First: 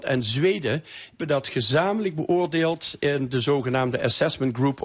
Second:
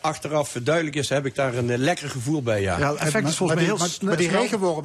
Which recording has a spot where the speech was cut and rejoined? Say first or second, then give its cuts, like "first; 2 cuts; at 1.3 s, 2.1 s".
first; 1 cut; at 1.2 s